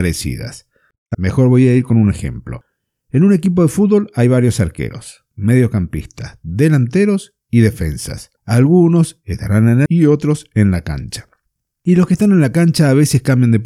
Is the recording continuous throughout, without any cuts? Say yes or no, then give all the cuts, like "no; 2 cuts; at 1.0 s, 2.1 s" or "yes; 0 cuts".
no; 3 cuts; at 1.1 s, 8.4 s, 9.9 s